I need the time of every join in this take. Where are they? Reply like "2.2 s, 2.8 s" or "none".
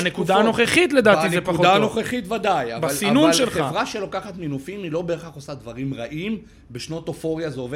none